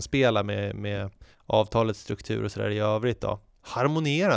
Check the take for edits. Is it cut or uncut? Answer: uncut